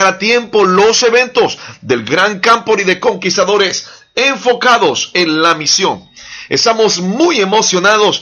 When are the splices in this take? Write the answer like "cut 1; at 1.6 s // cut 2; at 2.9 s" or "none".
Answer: none